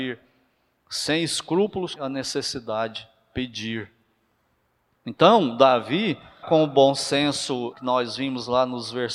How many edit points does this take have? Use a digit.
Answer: 3